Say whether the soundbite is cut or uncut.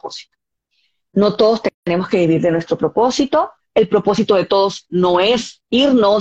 cut